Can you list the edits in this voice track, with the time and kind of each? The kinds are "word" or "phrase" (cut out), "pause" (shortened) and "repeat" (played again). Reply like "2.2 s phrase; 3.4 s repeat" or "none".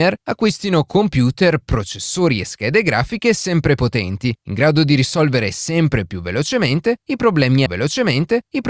3.8 s word; 7.7 s repeat

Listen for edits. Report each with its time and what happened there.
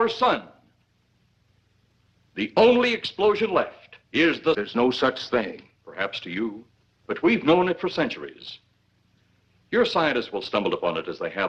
4.0 s pause; 4.5 s phrase; 5.8 s pause; 6.8 s pause

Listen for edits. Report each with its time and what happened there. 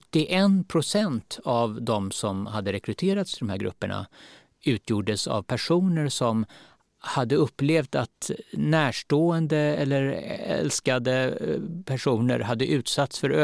none

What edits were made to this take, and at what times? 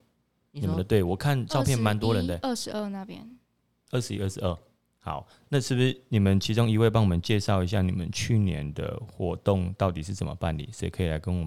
none

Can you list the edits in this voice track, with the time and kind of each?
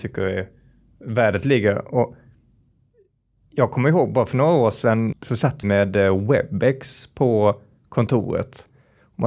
5.1 s word; 5.6 s word

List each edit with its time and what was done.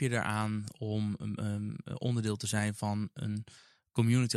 none

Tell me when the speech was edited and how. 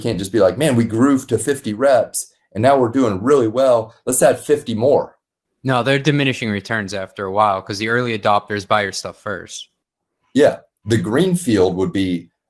none

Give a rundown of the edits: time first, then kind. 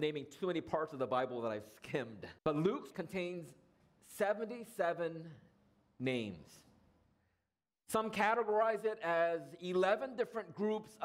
2.4 s pause; 2.9 s word

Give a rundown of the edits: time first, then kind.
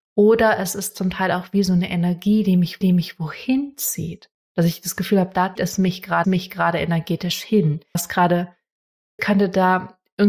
2.8 s repeat; 4.4 s pause; 5.6 s word; 6.2 s repeat; 7.9 s word; 9.2 s phrase

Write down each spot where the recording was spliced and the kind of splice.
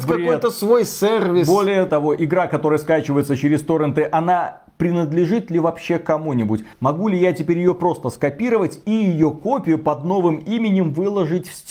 none

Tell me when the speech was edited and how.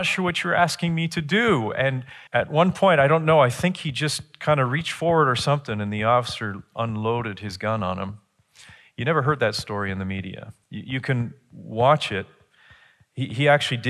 2.3 s pause; 10.6 s pause

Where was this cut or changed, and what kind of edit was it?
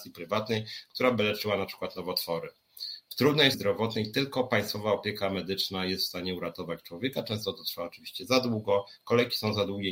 3.5 s word

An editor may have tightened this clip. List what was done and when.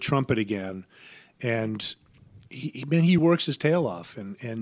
3.2 s word

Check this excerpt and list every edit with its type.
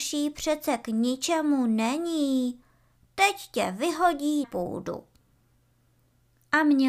4.4 s word

